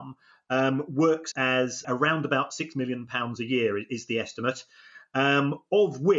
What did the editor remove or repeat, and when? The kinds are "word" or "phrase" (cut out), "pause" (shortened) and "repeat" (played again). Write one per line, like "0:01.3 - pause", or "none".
0:01.3 - word
0:01.8 - word